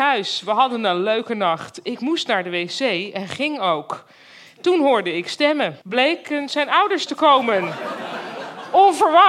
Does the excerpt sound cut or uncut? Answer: cut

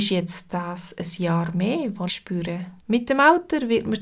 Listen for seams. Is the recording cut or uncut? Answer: cut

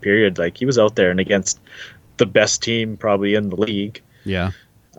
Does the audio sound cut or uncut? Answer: uncut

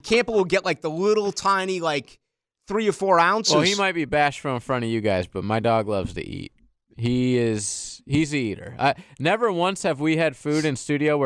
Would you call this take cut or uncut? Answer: uncut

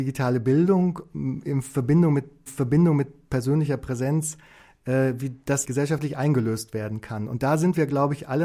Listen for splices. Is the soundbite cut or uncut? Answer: cut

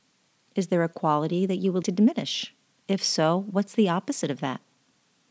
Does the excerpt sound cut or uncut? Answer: cut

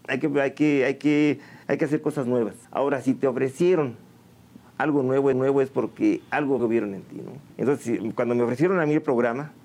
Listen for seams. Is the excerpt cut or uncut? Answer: cut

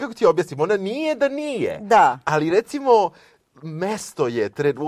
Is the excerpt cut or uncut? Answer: uncut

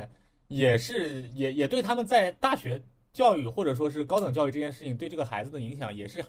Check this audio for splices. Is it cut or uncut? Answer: uncut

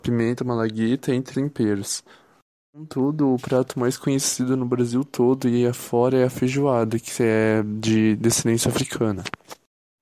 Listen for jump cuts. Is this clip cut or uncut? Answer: cut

